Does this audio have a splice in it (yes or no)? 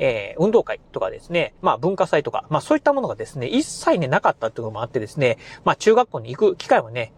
yes